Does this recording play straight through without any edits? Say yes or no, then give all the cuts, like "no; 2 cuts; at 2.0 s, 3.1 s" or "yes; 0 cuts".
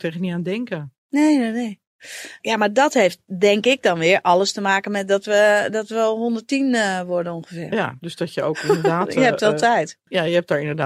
yes; 0 cuts